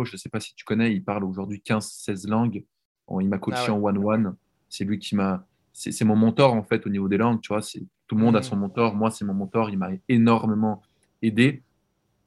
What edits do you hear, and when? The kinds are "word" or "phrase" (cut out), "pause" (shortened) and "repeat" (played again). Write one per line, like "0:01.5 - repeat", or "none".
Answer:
none